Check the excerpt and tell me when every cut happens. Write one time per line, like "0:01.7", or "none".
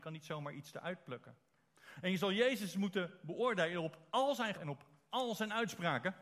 0:04.1
0:04.5